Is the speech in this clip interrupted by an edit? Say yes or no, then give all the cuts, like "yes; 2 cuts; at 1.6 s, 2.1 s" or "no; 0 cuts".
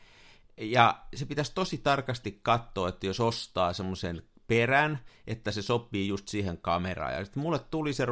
no; 0 cuts